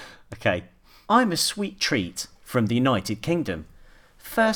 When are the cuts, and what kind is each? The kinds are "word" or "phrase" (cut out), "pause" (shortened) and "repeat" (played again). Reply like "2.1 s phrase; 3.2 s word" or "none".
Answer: none